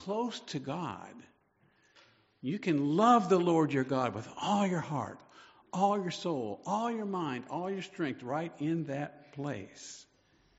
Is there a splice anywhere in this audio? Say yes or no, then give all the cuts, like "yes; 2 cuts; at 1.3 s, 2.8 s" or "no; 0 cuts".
no; 0 cuts